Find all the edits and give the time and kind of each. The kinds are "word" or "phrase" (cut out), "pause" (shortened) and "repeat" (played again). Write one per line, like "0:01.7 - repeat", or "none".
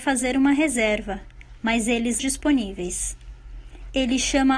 0:02.2 - phrase